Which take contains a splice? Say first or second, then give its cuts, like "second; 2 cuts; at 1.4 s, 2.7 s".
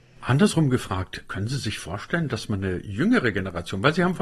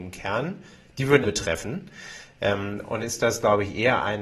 second; 2 cuts; at 1.2 s, 3.0 s